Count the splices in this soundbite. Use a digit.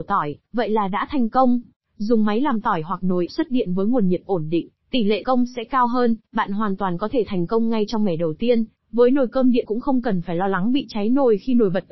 3